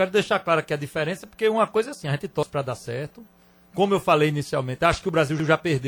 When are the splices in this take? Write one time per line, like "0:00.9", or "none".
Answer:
none